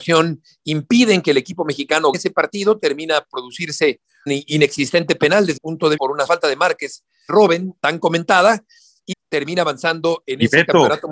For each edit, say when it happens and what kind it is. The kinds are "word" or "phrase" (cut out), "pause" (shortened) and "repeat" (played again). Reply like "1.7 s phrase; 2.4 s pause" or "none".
2.1 s word; 3.3 s word; 4.3 s word; 5.6 s word; 6.0 s word; 6.3 s word; 7.3 s word; 7.8 s word; 9.1 s word